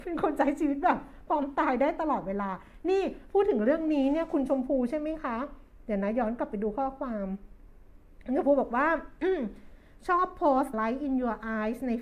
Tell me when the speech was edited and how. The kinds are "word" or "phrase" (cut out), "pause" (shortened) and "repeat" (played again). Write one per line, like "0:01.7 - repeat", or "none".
0:10.7 - word